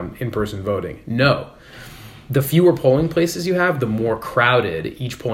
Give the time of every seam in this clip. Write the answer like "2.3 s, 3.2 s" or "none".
none